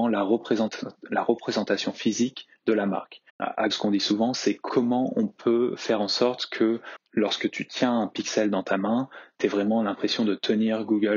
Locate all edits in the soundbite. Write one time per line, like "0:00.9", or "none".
0:03.3
0:03.7